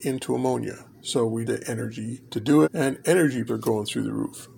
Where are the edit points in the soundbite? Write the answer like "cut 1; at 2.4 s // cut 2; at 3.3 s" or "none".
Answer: cut 1; at 0.9 s // cut 2; at 1.4 s // cut 3; at 2.3 s // cut 4; at 2.6 s // cut 5; at 3.5 s